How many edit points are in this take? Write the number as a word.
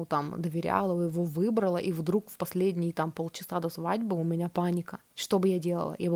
one